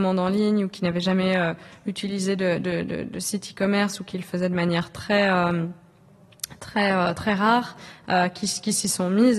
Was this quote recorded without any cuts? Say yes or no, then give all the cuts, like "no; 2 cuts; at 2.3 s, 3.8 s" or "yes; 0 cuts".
yes; 0 cuts